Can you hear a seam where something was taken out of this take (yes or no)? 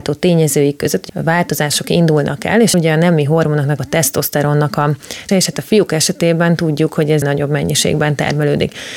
yes